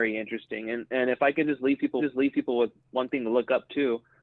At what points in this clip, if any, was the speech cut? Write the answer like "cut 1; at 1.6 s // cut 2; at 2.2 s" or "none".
cut 1; at 2.0 s